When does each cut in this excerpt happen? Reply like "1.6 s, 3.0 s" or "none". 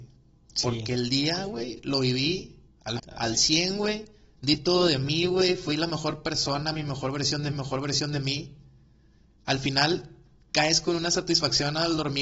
2.7 s, 3.0 s, 7.5 s

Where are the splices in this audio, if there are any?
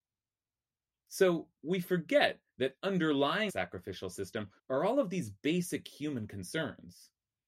2.5 s, 3.5 s, 4.6 s

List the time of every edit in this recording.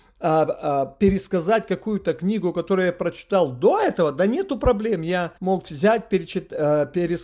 5.4 s

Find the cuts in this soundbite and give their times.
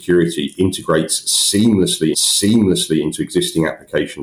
2.1 s

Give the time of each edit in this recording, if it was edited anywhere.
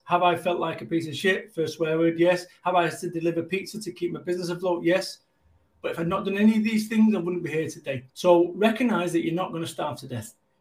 8.1 s

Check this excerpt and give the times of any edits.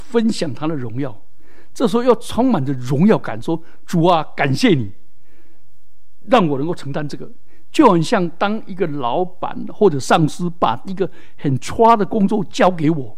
none

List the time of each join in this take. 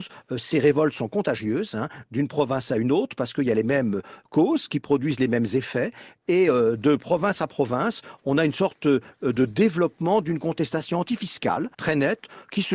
11.7 s

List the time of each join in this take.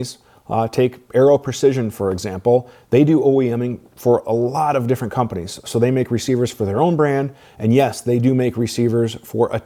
none

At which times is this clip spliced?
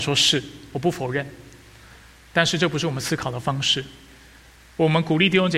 none

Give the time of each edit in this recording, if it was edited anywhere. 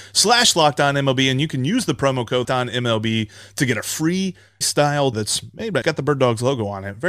2.4 s, 4.6 s, 5.1 s, 5.8 s

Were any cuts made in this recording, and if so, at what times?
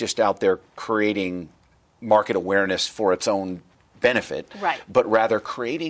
none

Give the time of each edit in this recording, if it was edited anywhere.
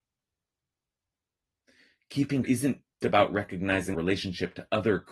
2.4 s, 3.0 s, 3.9 s

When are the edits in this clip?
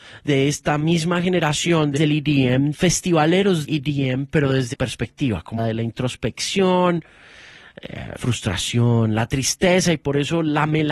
2.0 s, 2.7 s, 3.6 s, 4.7 s, 5.6 s, 8.2 s

